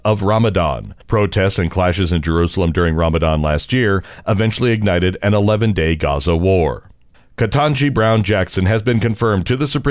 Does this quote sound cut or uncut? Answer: cut